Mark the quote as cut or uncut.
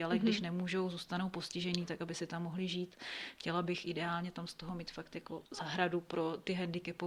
cut